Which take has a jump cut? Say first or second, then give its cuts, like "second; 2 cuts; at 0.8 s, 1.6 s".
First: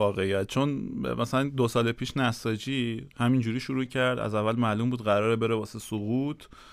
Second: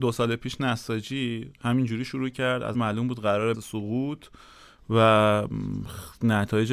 second; 2 cuts; at 2.7 s, 3.5 s